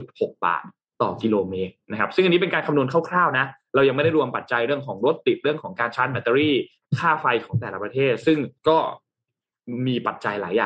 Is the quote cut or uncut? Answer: cut